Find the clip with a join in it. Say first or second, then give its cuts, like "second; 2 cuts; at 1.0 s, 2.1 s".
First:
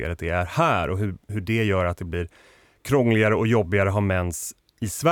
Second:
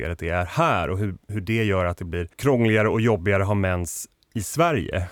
second; 1 cut; at 2.3 s